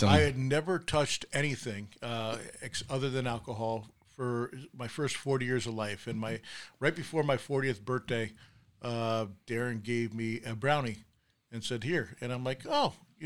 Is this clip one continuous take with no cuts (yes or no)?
yes